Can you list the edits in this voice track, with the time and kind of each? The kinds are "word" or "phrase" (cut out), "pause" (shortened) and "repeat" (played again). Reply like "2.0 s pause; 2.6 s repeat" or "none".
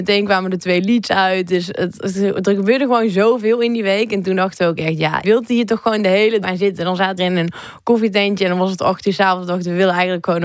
5.2 s word; 6.4 s word; 7.2 s word